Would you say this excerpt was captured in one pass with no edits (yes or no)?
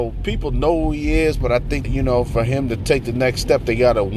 no